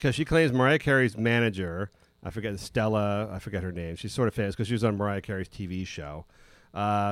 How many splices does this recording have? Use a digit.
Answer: 0